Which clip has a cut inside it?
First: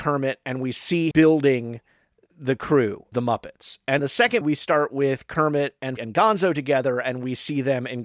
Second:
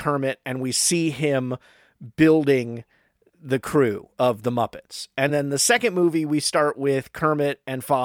first; 5 cuts; at 1.1 s, 3.1 s, 4.0 s, 4.4 s, 6.0 s

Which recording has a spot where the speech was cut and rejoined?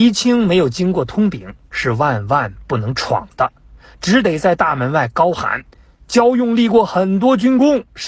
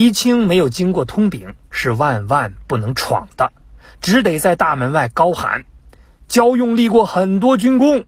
first; 1 cut; at 5.7 s

